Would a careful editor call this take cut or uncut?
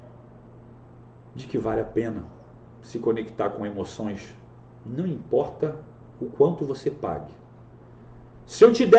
uncut